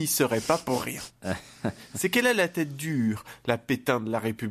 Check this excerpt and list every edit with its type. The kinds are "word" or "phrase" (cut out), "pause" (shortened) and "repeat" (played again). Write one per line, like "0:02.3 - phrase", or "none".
none